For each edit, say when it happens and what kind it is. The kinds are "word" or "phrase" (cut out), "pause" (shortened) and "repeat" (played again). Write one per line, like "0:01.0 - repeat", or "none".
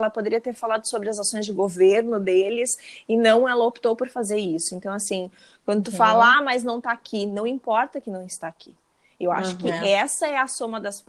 none